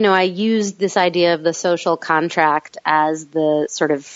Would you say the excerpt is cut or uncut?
uncut